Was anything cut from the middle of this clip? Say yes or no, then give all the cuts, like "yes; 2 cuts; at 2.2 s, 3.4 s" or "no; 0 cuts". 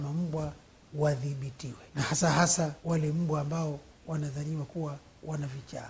yes; 2 cuts; at 1.9 s, 2.8 s